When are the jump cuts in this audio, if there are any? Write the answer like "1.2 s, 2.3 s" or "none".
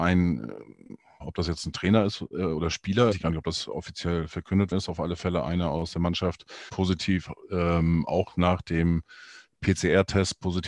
1.2 s, 3.1 s, 4.7 s, 6.7 s